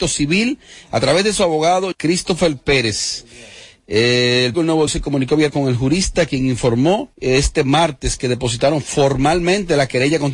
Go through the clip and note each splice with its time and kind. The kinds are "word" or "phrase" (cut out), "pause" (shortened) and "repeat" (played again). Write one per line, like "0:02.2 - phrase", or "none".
0:01.9 - word
0:04.5 - word
0:04.9 - word
0:05.5 - word
0:07.1 - pause